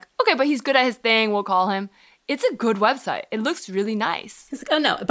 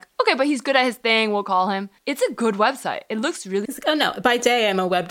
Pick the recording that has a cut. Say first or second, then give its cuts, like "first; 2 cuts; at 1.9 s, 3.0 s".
second; 2 cuts; at 2.0 s, 3.6 s